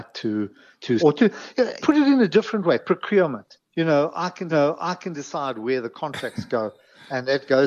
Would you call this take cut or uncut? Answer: cut